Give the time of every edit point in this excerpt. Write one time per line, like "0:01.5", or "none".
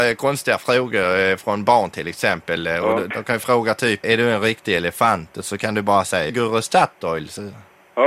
0:04.0
0:06.3

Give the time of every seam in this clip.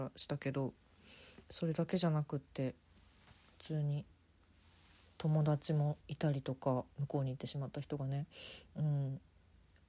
0:01.4
0:06.0
0:06.9

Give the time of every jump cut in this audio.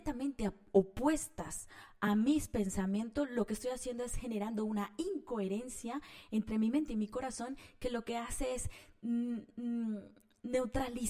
none

